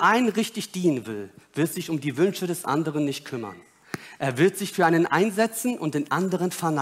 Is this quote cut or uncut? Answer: uncut